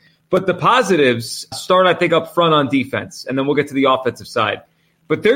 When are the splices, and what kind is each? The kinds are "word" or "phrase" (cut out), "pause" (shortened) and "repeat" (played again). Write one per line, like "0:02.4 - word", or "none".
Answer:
0:01.5 - word